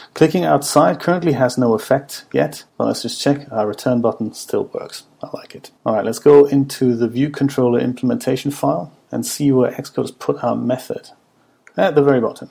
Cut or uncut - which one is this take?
cut